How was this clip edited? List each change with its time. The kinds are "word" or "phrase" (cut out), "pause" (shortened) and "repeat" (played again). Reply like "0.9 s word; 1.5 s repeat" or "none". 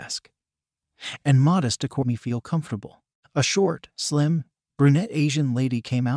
2.0 s word